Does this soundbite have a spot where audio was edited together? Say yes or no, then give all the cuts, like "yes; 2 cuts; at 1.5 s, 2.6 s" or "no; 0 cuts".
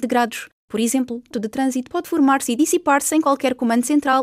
yes; 1 cut; at 1.3 s